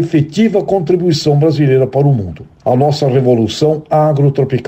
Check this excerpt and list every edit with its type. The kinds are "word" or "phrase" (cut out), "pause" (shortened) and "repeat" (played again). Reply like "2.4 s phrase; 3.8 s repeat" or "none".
none